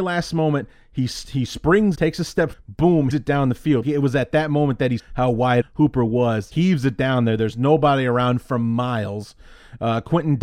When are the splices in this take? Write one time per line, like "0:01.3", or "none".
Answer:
0:01.9
0:02.5
0:03.1
0:03.8
0:05.0
0:05.6
0:06.5